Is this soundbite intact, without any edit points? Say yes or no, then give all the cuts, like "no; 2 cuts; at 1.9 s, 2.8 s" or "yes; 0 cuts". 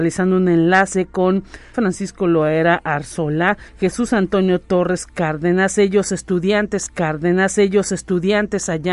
no; 3 cuts; at 1.7 s, 3.7 s, 6.9 s